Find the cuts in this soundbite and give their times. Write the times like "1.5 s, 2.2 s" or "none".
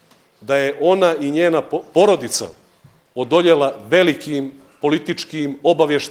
none